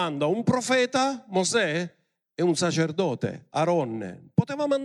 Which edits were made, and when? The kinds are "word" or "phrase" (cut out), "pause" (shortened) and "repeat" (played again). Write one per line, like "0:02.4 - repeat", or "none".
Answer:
0:02.2 - pause